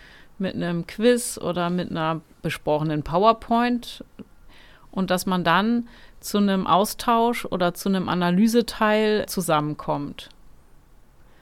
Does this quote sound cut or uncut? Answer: cut